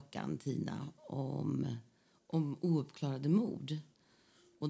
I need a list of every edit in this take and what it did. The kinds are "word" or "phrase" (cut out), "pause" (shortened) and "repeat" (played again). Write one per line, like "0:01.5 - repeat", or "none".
none